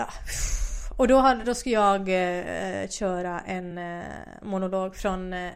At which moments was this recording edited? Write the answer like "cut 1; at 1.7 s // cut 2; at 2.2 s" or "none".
none